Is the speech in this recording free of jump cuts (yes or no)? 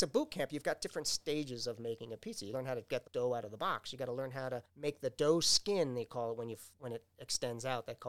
no